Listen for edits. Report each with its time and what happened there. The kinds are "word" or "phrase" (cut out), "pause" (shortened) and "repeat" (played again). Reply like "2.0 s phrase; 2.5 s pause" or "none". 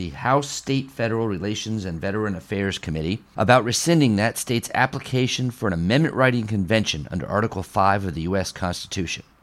none